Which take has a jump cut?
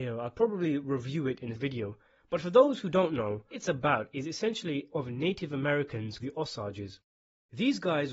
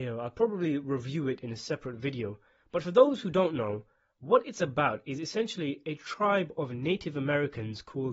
first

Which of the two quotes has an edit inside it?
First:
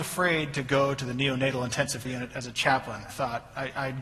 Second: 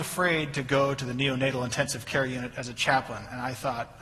first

